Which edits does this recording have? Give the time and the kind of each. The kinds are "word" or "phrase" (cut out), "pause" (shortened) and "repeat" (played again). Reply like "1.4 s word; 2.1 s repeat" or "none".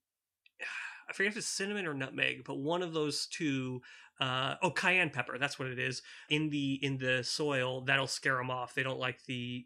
6.3 s word